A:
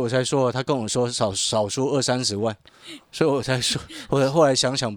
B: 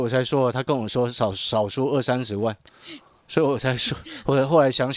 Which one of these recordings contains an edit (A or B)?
A